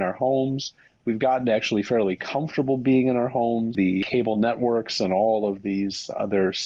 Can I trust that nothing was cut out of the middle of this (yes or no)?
yes